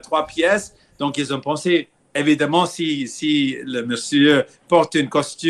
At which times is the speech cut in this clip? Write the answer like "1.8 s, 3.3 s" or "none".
2.0 s